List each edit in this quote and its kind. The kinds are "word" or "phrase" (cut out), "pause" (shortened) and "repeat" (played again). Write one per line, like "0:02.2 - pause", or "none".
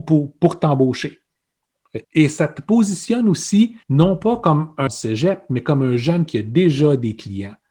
0:02.0 - pause
0:03.8 - pause
0:04.9 - phrase
0:06.3 - word